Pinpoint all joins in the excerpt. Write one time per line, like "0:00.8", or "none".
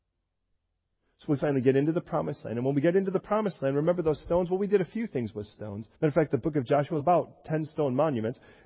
0:05.9
0:07.0